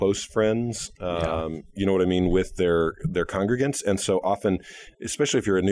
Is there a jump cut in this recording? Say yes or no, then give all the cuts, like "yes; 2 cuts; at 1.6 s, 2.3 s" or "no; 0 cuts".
no; 0 cuts